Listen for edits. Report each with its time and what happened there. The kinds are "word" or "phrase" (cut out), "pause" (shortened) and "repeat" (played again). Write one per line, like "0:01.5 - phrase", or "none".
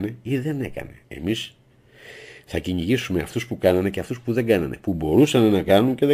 0:01.0 - pause